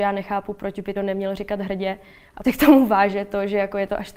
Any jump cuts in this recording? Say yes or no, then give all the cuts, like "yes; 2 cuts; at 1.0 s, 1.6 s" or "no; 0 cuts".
yes; 2 cuts; at 1.0 s, 2.4 s